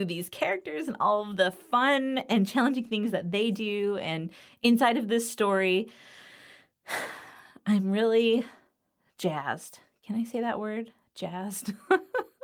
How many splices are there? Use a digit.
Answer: 0